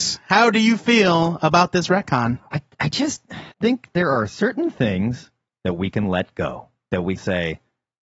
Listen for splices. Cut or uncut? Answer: cut